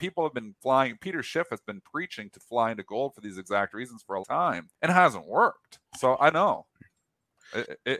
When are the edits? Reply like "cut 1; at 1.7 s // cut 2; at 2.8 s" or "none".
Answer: cut 1; at 4.2 s // cut 2; at 4.7 s // cut 3; at 5.9 s // cut 4; at 6.3 s